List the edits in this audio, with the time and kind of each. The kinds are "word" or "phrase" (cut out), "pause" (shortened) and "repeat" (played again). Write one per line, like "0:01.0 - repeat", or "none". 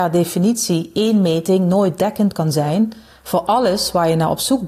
none